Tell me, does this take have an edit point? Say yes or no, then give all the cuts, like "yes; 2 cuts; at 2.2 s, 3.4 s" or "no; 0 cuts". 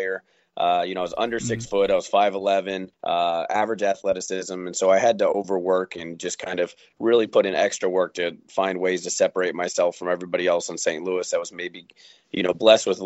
yes; 1 cut; at 2.9 s